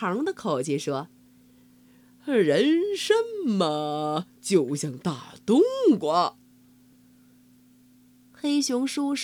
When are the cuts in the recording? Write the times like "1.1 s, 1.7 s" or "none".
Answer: 4.4 s